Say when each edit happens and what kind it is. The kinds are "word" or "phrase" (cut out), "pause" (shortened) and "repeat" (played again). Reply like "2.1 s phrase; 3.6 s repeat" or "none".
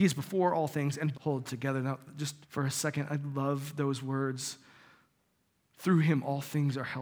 1.1 s phrase; 2.4 s pause